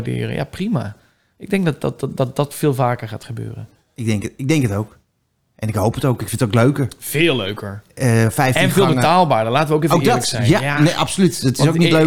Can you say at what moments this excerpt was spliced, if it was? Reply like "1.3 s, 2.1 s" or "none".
none